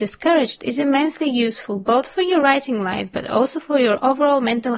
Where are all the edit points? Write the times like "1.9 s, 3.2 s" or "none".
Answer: none